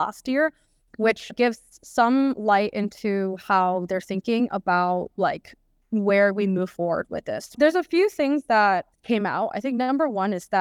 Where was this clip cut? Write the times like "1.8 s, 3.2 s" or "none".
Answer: none